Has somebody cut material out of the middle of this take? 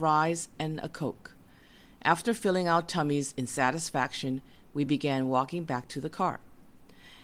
no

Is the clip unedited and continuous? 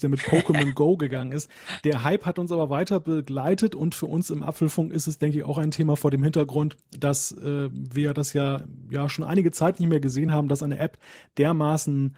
yes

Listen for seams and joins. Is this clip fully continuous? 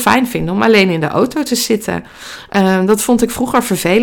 yes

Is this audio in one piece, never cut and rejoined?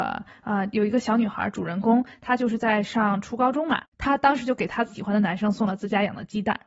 no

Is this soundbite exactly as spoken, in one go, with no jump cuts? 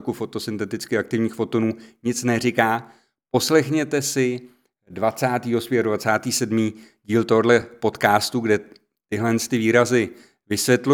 yes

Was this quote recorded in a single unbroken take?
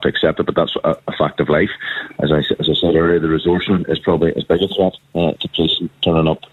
no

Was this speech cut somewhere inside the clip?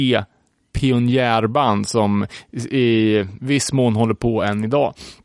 no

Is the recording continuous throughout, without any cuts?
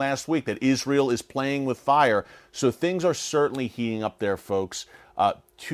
yes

